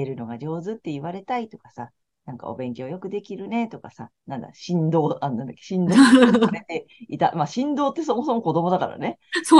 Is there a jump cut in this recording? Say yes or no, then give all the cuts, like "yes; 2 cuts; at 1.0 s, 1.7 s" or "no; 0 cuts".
no; 0 cuts